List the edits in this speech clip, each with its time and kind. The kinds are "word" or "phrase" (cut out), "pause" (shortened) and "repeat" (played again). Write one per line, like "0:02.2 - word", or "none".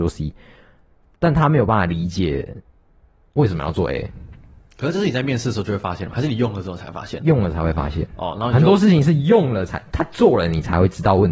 none

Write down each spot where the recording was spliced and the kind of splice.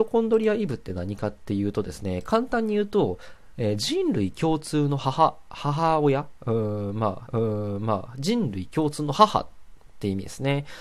0:07.3 - repeat

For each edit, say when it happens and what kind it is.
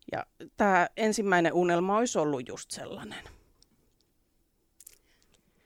none

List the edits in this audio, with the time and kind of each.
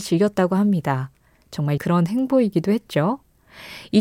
0:01.8 - word

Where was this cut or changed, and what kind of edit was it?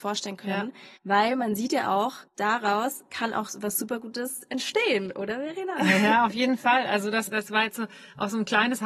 0:01.0 - pause
0:02.3 - pause
0:07.3 - word

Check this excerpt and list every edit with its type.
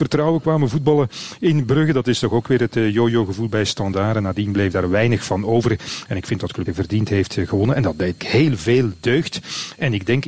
0:06.7 - phrase
0:08.2 - word

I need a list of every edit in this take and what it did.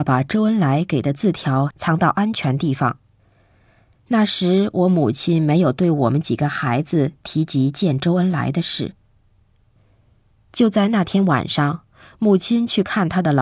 none

